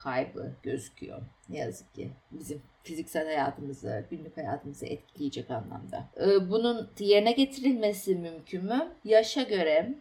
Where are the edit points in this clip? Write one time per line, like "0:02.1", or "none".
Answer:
0:02.2